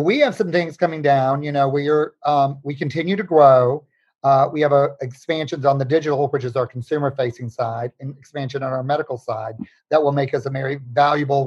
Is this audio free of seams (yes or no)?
yes